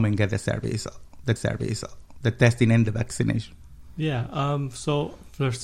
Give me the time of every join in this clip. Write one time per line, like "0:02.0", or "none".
0:01.4